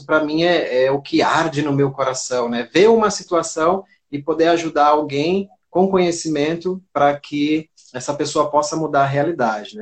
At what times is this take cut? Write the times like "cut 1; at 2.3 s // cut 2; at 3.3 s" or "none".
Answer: none